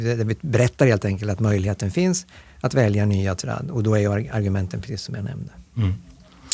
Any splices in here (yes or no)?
no